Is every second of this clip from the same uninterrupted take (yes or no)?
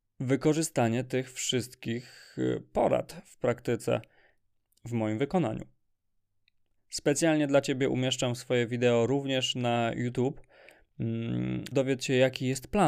no